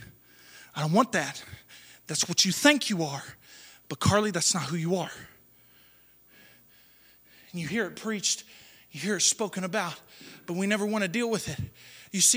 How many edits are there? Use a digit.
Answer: 0